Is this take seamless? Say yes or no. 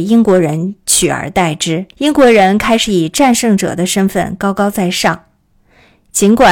no